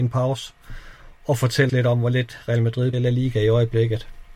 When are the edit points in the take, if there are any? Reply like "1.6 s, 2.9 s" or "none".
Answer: 1.7 s, 2.9 s